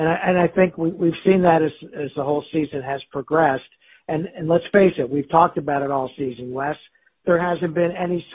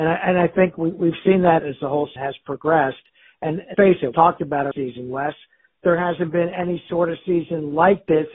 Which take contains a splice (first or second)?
second